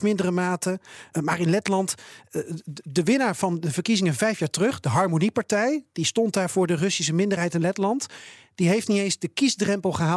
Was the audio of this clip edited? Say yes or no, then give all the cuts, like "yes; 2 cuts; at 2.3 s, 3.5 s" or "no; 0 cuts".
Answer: yes; 1 cut; at 1.1 s